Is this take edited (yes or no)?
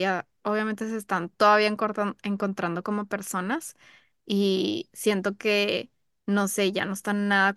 no